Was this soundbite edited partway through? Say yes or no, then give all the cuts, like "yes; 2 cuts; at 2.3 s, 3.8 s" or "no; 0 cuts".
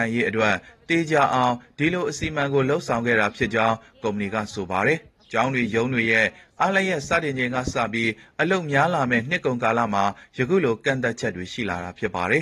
yes; 1 cut; at 5.2 s